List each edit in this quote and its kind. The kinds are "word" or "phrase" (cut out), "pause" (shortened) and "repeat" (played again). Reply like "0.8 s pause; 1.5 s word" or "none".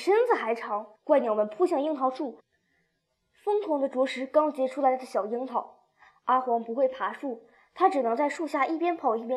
1.0 s pause